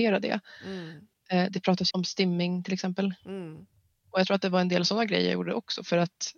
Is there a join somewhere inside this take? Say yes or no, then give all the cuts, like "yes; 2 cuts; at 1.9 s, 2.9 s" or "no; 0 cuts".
yes; 1 cut; at 1.9 s